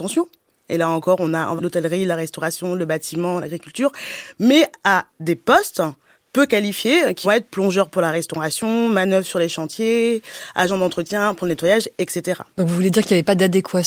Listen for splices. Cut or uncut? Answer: cut